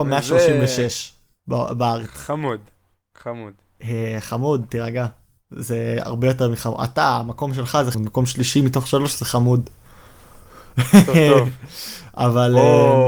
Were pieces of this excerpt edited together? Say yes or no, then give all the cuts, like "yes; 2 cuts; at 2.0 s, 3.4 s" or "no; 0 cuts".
yes; 1 cut; at 7.9 s